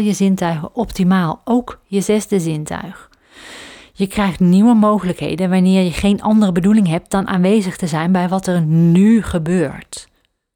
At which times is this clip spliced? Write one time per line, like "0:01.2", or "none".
none